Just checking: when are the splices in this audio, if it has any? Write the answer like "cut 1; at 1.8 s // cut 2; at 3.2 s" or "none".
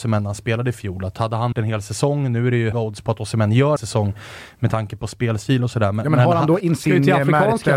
cut 1; at 1.5 s // cut 2; at 2.7 s // cut 3; at 3.8 s // cut 4; at 6.6 s